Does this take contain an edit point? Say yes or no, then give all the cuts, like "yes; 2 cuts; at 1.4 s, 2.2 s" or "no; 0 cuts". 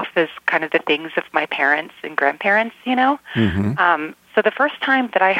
no; 0 cuts